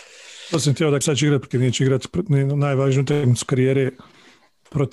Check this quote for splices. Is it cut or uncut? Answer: cut